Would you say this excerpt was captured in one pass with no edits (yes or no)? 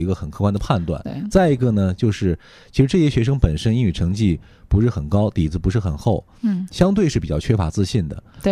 yes